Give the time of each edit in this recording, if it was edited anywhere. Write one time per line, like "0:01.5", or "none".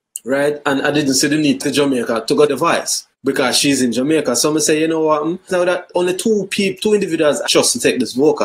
0:01.6
0:02.5
0:03.1
0:05.5
0:07.4